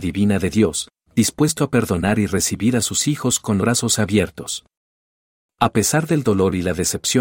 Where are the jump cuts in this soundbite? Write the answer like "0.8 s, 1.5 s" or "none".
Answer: 3.6 s

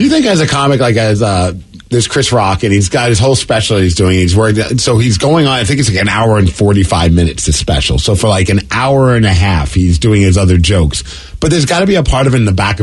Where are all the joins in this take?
1.8 s

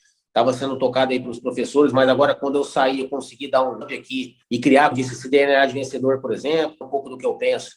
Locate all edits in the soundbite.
3.8 s, 4.4 s, 4.9 s, 6.8 s

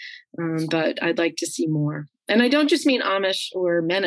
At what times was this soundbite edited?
none

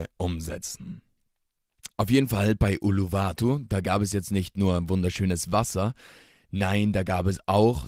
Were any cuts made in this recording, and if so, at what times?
1.9 s

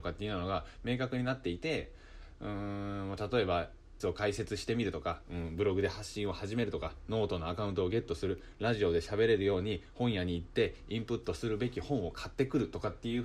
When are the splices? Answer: 4.0 s

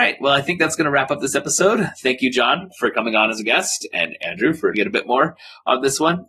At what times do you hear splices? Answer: 4.7 s

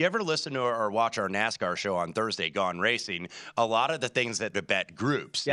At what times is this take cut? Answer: 4.5 s

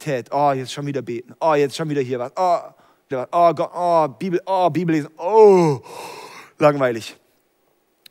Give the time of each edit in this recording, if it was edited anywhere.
3.1 s

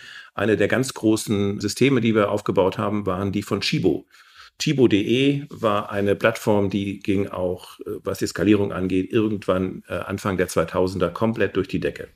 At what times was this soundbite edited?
1.6 s

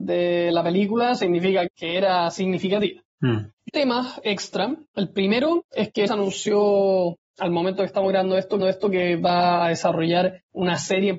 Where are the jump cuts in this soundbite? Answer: 1.7 s, 3.1 s, 3.7 s, 4.9 s, 6.1 s, 8.6 s

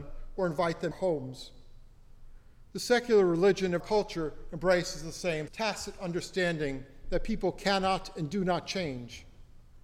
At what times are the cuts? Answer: 0.9 s, 3.8 s, 5.5 s

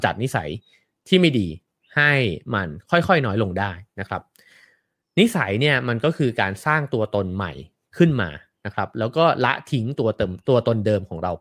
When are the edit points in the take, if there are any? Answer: none

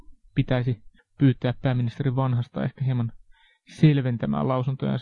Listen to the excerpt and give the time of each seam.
1.0 s

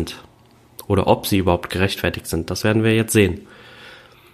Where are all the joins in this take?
none

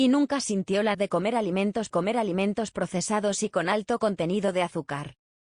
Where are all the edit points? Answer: 0.9 s, 1.9 s

